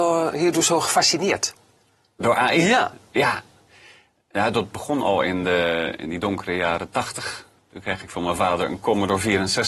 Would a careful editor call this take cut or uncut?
uncut